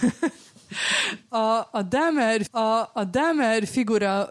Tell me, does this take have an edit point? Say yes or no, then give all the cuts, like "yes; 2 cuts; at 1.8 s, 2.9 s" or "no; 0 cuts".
yes; 1 cut; at 2.5 s